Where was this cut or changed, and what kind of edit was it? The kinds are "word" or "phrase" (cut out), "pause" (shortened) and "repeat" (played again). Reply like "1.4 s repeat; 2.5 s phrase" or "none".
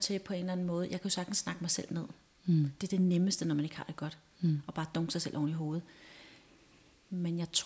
none